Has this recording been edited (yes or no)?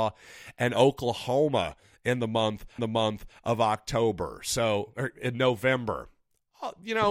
yes